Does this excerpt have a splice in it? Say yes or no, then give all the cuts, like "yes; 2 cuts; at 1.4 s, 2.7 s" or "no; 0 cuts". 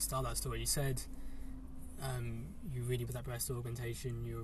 yes; 1 cut; at 3.1 s